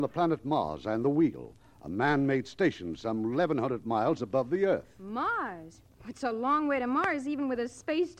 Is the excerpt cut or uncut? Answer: uncut